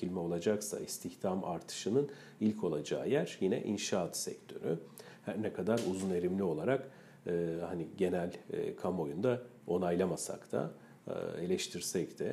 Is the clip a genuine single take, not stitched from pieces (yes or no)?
yes